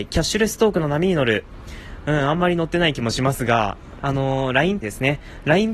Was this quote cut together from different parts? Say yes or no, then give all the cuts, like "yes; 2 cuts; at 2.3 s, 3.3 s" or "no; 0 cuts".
yes; 2 cuts; at 4.0 s, 4.8 s